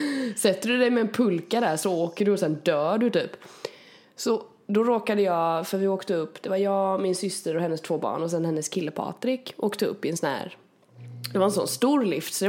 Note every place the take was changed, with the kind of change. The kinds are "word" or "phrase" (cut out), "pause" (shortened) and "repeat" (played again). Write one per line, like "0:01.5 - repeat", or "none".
none